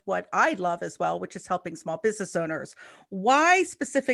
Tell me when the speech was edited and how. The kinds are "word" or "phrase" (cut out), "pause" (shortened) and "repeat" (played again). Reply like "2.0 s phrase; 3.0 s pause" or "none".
none